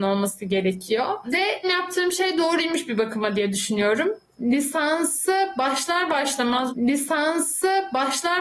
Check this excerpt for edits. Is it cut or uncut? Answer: cut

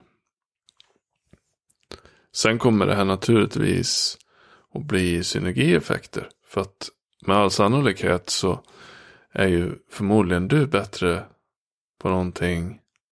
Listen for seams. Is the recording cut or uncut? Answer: uncut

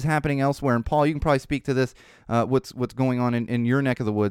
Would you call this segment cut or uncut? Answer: uncut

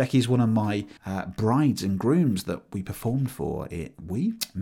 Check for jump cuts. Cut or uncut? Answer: cut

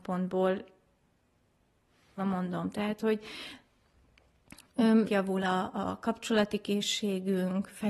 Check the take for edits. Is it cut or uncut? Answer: cut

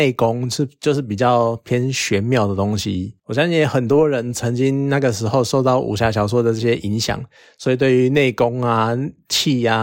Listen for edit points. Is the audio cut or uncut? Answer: uncut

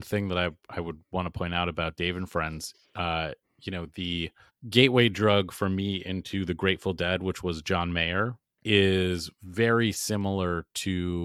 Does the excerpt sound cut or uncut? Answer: cut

